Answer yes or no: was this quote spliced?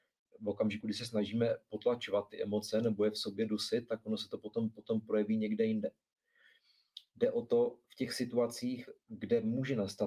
no